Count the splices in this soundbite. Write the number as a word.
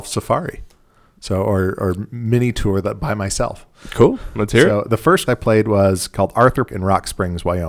two